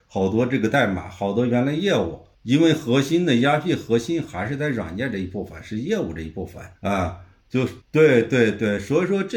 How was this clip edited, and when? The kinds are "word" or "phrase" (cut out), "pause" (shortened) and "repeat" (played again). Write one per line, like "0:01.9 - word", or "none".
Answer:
0:02.3 - pause
0:06.8 - pause
0:07.8 - pause

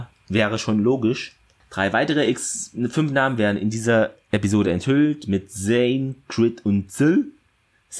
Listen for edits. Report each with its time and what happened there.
none

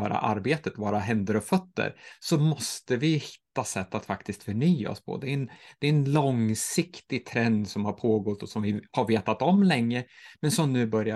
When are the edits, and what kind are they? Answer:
none

